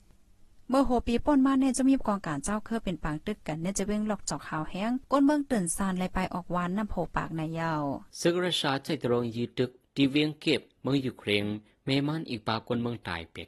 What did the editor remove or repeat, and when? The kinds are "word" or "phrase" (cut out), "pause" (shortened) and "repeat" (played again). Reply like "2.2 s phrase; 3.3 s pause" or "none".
8.1 s pause